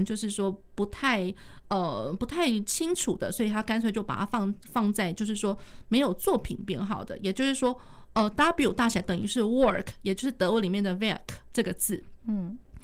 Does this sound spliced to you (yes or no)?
yes